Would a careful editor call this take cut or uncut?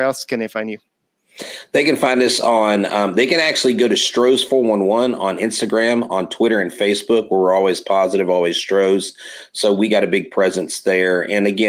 uncut